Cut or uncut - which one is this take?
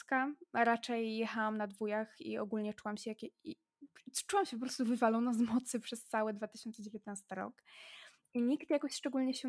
uncut